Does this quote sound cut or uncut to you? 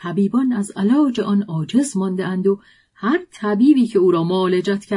uncut